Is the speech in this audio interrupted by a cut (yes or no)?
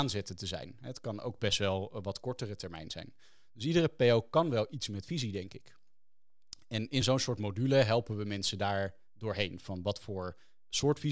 no